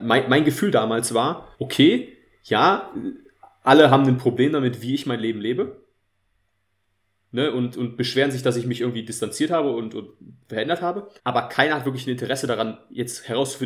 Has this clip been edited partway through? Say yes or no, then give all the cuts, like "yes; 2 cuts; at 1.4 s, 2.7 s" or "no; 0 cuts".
yes; 2 cuts; at 1.5 s, 11.2 s